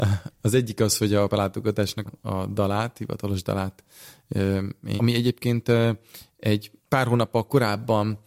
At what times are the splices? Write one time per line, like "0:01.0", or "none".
0:01.3
0:02.1
0:05.0
0:06.8